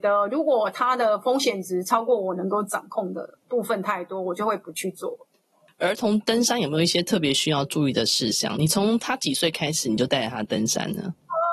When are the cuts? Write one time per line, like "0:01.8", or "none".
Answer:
none